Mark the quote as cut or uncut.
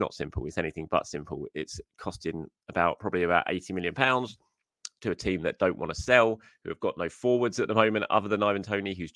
uncut